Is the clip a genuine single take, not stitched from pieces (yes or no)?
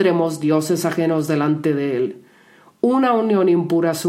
yes